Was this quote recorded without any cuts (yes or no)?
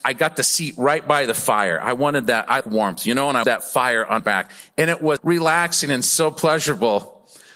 no